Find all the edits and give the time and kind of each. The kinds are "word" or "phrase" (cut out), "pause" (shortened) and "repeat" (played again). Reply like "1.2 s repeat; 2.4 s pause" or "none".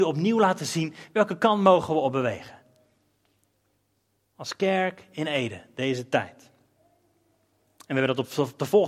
none